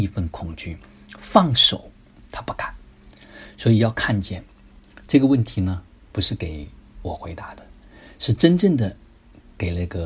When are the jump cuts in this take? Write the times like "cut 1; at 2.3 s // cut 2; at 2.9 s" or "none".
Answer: none